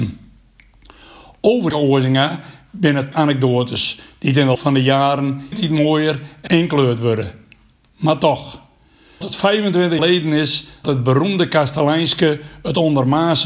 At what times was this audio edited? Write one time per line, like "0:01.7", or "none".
0:01.7
0:03.1
0:04.5
0:05.5
0:06.5
0:09.2
0:10.0
0:10.8